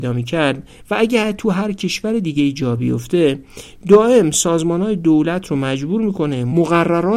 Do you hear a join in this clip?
no; 0 cuts

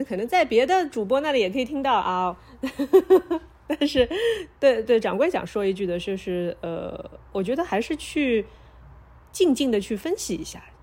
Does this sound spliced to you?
no; 0 cuts

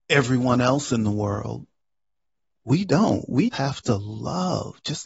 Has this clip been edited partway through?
yes; 1 cut; at 3.5 s

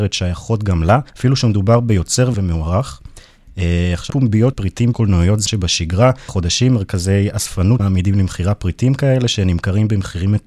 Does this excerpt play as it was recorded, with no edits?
no; 8 cuts; at 1.1 s, 2.3 s, 4.1 s, 4.5 s, 4.9 s, 5.5 s, 6.3 s, 7.8 s

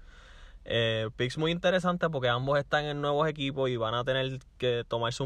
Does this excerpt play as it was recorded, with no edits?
yes; 0 cuts

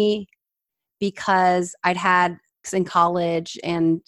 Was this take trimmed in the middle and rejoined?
yes; 1 cut; at 2.6 s

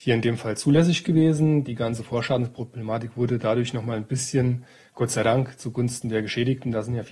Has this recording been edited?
no; 0 cuts

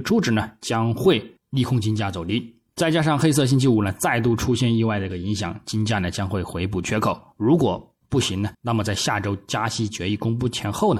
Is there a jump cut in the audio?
yes; 3 cuts; at 1.4 s, 8.0 s, 8.5 s

